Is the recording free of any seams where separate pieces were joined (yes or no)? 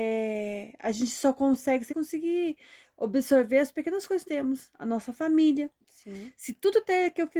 no